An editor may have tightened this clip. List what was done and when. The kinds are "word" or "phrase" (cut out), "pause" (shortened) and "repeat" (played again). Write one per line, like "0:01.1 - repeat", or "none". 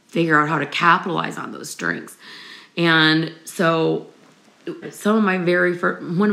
0:04.8 - word